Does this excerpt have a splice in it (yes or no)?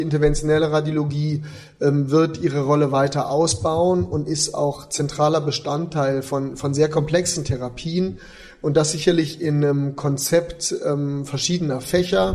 no